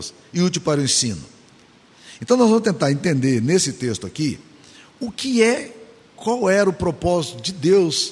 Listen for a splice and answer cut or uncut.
uncut